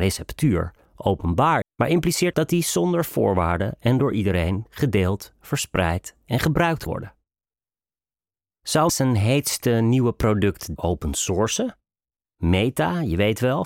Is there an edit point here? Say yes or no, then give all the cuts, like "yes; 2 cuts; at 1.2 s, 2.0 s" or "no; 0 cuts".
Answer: yes; 5 cuts; at 1.6 s, 2.3 s, 6.9 s, 8.9 s, 10.8 s